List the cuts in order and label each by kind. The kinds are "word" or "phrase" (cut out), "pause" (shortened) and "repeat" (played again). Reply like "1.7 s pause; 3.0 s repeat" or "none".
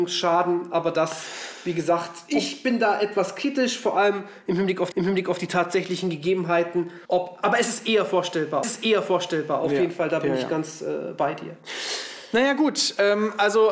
4.9 s repeat; 7.0 s pause; 8.6 s repeat

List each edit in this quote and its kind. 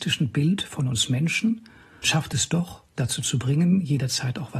2.0 s word; 3.0 s word

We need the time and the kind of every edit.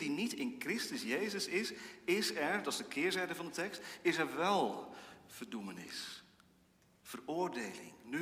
none

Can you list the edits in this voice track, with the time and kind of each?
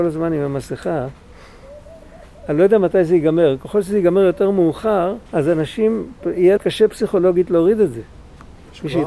5.3 s pause; 6.6 s word

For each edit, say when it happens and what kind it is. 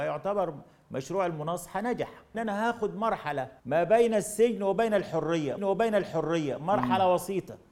2.3 s phrase; 3.6 s pause; 5.6 s repeat

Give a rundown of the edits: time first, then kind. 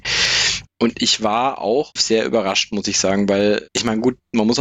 2.0 s word; 3.7 s word

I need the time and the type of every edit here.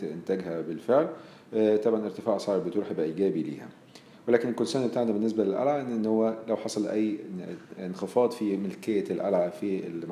none

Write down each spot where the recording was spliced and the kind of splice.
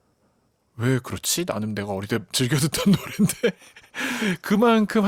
none

